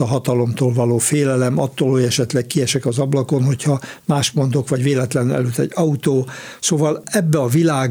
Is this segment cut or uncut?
uncut